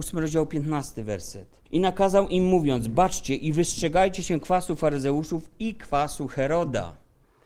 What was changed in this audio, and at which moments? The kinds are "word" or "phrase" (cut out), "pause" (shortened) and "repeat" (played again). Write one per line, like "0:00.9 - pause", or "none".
0:01.7 - pause